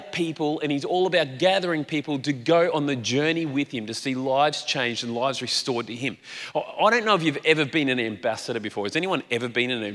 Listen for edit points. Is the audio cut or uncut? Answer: uncut